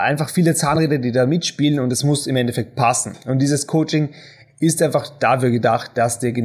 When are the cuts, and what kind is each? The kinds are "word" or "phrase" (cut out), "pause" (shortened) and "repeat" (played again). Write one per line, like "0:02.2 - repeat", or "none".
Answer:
none